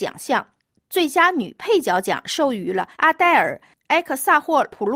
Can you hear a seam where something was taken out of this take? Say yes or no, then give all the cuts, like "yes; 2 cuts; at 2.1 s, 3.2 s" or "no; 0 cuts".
yes; 1 cut; at 2.9 s